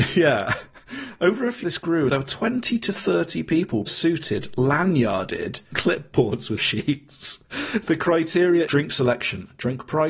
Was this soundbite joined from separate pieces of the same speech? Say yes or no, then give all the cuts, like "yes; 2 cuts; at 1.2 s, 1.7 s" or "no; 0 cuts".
yes; 6 cuts; at 1.6 s, 2.1 s, 3.9 s, 5.7 s, 6.6 s, 8.7 s